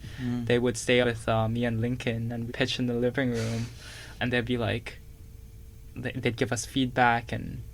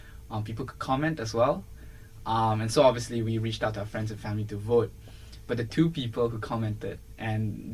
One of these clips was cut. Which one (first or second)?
first